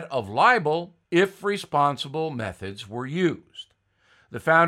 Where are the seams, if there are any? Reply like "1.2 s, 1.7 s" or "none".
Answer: 1.0 s